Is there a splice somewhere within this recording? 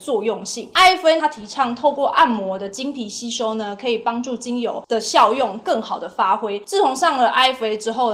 yes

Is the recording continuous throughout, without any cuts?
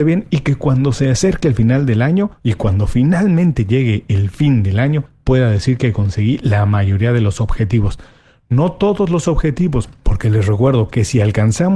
yes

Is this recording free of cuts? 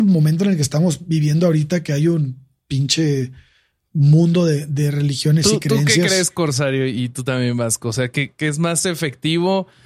yes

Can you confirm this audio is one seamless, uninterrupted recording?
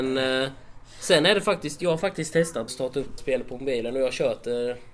no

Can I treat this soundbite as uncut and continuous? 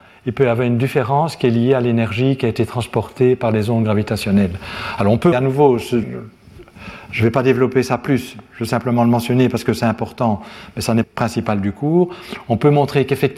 no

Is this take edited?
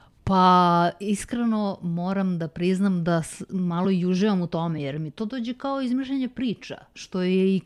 no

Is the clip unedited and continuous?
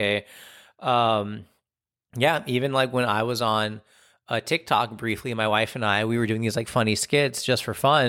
yes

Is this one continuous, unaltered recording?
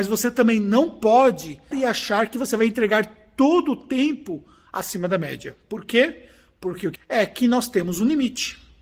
no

